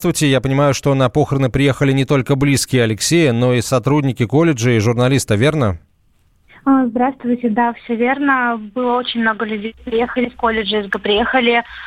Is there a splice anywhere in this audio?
yes; 2 cuts; at 10.3 s, 10.9 s

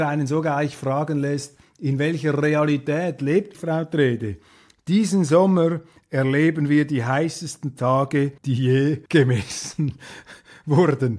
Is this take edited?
yes; 3 cuts; at 3.5 s, 8.4 s, 9.1 s

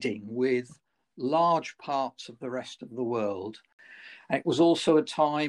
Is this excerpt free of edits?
yes; 0 cuts

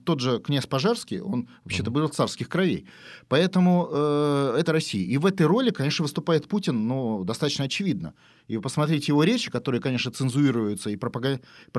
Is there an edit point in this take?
yes; 1 cut; at 4.6 s

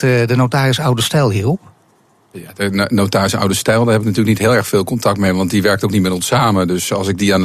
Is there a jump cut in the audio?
no; 0 cuts

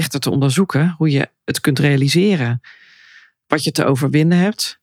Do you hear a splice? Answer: no; 0 cuts

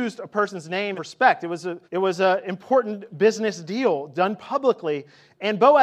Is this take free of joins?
no; 2 cuts; at 1.0 s, 1.9 s

